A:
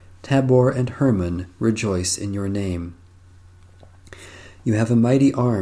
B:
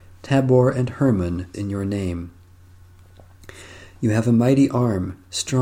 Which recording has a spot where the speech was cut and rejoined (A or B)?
B